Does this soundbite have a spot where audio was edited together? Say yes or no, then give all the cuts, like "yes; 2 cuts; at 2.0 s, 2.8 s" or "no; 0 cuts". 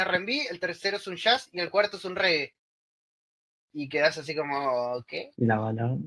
no; 0 cuts